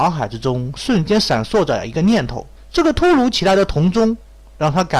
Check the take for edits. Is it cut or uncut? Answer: cut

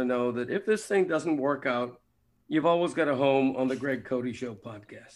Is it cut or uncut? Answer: uncut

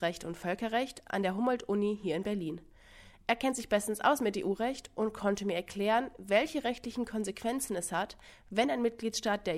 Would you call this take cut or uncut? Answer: uncut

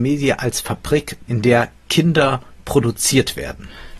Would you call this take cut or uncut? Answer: cut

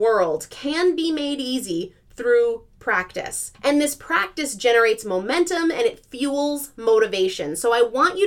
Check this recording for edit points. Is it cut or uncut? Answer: cut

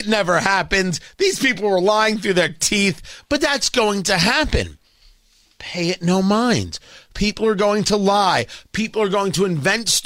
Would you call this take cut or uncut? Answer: uncut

